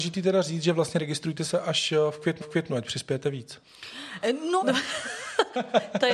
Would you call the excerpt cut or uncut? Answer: cut